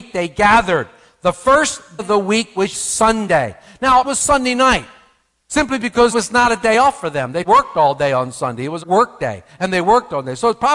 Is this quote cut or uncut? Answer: cut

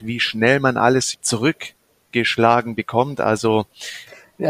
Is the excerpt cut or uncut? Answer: cut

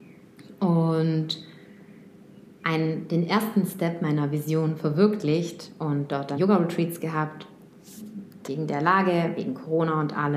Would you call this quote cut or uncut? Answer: cut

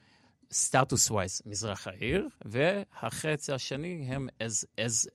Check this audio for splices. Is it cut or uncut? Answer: cut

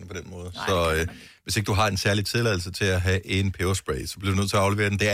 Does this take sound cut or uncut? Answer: uncut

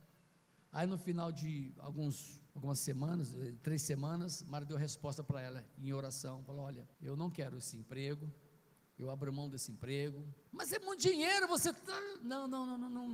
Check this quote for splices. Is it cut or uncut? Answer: cut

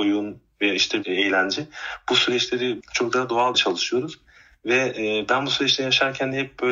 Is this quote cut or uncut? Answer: cut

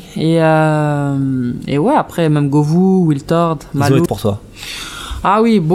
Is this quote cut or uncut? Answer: cut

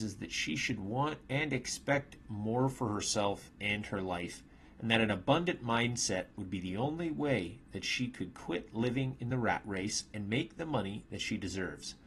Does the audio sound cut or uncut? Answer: uncut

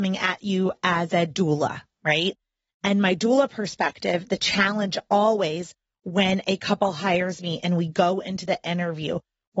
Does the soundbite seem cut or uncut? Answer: uncut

